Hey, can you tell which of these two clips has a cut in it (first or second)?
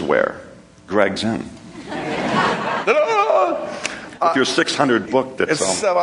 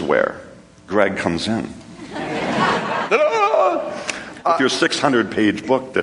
first